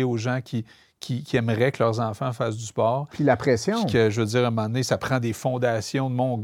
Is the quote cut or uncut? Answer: uncut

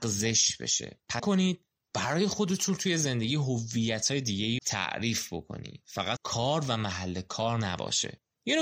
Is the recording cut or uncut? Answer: cut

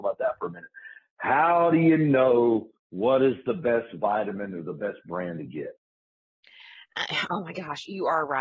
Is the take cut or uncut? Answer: cut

